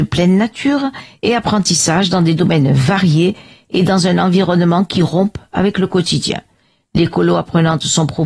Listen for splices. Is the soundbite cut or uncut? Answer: uncut